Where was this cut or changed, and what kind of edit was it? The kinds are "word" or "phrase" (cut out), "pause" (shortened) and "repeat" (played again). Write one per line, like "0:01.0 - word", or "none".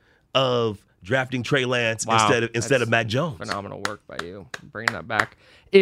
none

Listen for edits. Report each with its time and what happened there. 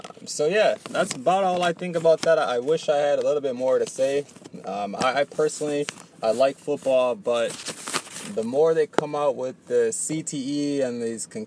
none

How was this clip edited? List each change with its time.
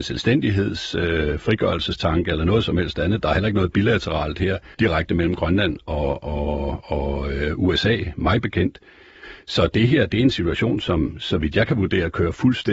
0:04.7 - pause

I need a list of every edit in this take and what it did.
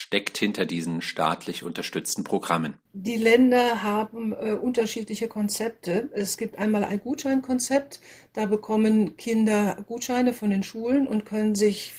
none

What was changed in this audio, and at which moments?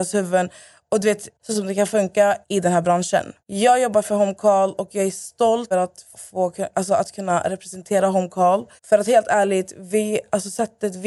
0:02.4 - pause
0:03.4 - pause
0:05.7 - word
0:06.1 - word
0:08.8 - pause

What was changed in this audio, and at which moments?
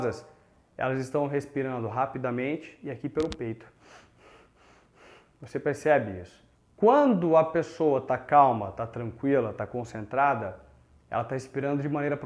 0:06.5 - pause

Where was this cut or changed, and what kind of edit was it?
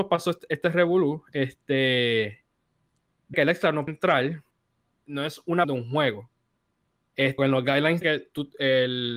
0:03.3 - word
0:03.9 - word
0:05.0 - word
0:05.6 - word
0:07.4 - word
0:08.0 - word

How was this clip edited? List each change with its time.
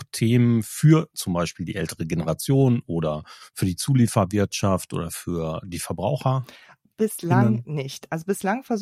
none

